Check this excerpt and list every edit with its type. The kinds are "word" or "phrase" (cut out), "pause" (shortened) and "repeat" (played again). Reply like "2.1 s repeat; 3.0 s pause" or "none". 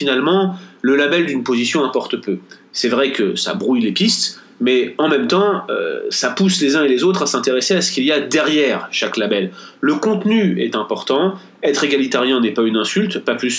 none